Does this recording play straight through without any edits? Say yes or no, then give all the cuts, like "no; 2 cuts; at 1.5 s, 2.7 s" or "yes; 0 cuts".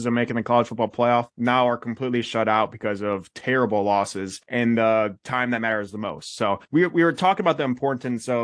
no; 3 cuts; at 1.3 s, 4.4 s, 6.6 s